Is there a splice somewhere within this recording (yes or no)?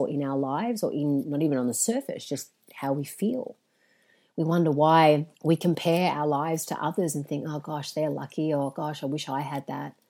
yes